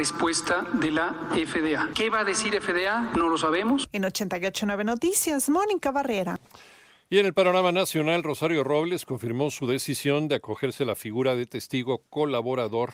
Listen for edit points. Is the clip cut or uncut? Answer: uncut